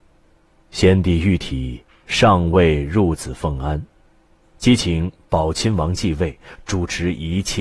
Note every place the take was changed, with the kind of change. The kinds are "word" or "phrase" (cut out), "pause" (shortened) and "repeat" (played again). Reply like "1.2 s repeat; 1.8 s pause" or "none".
none